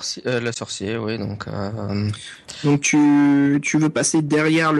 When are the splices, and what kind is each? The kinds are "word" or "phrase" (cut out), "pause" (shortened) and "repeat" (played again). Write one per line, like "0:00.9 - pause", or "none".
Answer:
none